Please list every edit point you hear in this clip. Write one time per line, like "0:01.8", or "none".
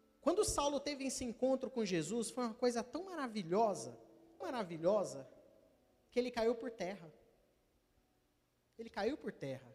0:04.4